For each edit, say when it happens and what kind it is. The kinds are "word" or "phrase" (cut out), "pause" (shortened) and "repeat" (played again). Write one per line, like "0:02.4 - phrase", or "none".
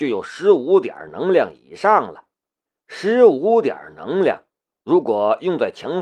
0:02.6 - pause

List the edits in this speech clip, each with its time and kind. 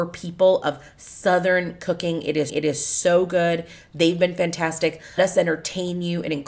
0:02.5 - repeat
0:05.2 - word

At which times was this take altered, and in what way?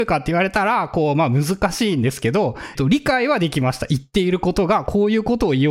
0:02.7 - phrase

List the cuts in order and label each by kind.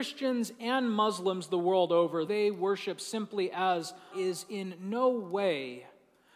0:02.3 - phrase
0:04.1 - word

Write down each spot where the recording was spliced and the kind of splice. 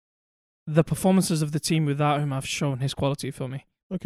none

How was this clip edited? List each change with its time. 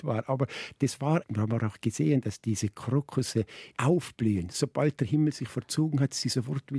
0:01.2 - word
0:03.7 - phrase

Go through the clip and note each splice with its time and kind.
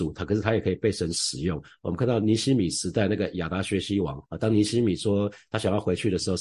0:04.3 - pause

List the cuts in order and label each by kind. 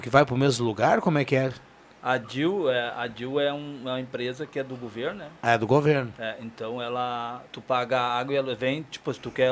0:07.5 - pause

